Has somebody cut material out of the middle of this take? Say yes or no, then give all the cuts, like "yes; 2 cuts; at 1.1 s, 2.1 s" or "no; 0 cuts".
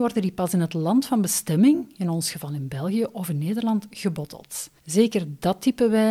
yes; 1 cut; at 4.8 s